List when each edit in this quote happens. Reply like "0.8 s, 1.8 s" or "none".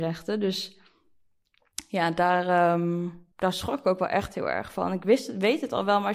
3.3 s